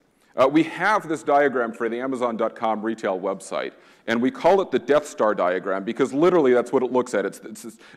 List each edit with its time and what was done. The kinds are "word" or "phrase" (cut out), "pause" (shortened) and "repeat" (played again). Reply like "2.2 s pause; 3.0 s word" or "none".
none